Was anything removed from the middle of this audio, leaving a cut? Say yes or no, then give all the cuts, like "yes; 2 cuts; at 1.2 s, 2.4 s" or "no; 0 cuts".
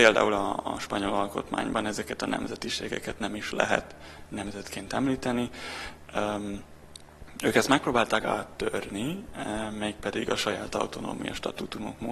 no; 0 cuts